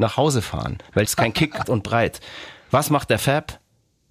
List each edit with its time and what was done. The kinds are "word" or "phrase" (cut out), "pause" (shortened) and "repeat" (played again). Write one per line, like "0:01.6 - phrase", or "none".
0:01.1 - phrase
0:01.6 - word